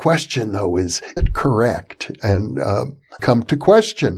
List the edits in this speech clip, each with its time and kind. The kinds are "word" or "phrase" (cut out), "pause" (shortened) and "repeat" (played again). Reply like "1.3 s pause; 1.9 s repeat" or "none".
1.2 s word; 3.2 s word